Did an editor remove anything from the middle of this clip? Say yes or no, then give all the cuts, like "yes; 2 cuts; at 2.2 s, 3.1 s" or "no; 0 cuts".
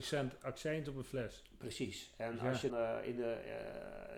yes; 1 cut; at 2.7 s